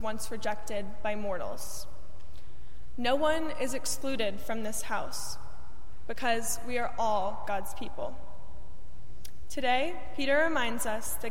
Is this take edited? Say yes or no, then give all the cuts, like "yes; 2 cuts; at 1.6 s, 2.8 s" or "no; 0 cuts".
no; 0 cuts